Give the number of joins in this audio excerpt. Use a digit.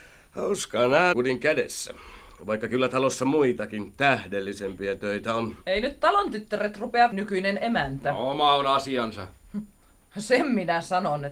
3